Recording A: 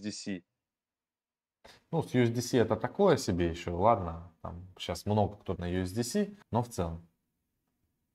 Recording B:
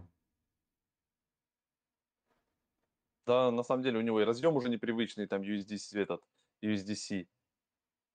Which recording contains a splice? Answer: A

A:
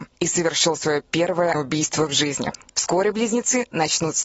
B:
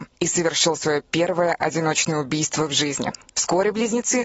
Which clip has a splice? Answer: A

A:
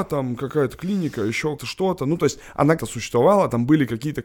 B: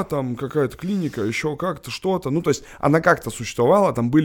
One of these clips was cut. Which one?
A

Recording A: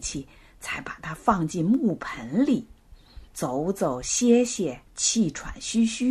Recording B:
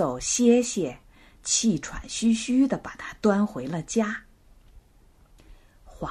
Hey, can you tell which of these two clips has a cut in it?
A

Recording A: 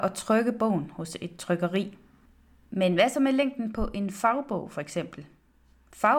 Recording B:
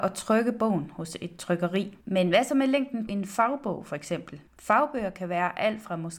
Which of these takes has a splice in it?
B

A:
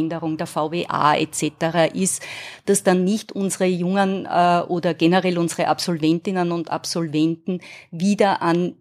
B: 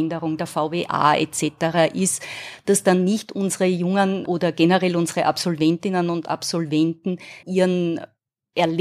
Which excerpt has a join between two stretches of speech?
B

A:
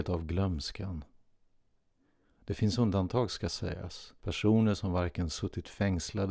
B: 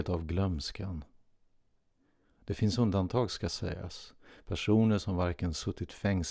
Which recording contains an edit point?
A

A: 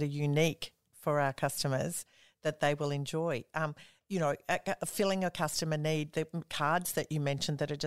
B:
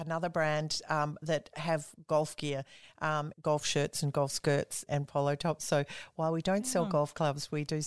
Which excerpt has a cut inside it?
B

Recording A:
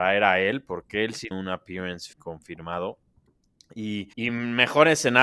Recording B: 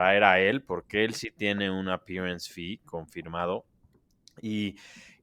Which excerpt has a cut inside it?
A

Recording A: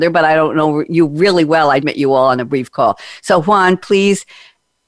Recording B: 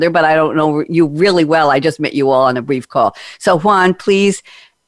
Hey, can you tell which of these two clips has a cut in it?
A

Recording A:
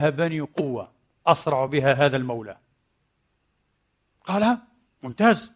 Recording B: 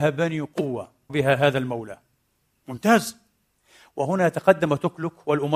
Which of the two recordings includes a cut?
B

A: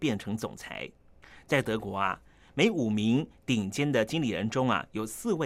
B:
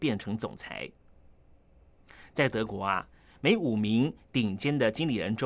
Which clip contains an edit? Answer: A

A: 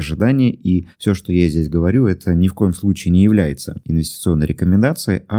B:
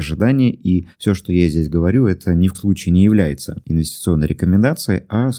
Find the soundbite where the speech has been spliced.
B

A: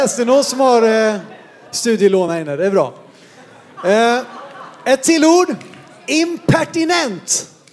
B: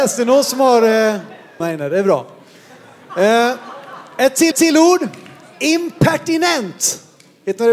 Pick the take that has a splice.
B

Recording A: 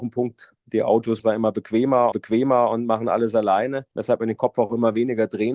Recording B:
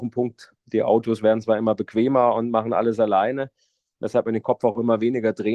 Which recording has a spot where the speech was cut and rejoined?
A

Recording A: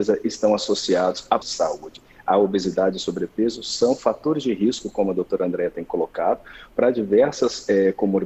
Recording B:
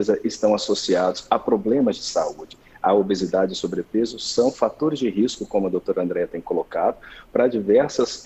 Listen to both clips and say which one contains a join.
A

